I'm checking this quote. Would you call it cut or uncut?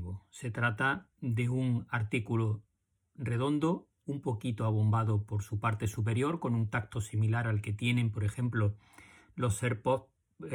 uncut